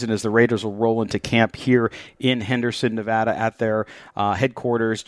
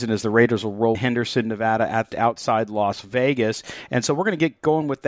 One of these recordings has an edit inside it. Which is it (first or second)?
second